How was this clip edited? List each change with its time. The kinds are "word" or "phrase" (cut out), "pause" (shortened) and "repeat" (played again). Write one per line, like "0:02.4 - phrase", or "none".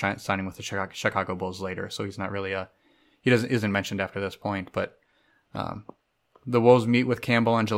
none

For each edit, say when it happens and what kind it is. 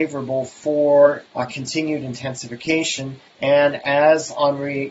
0:01.3 - pause
0:03.3 - pause

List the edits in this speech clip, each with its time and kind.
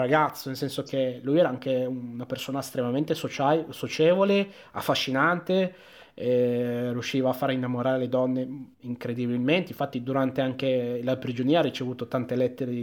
0:08.7 - pause

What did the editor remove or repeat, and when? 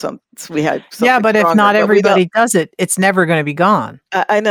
none

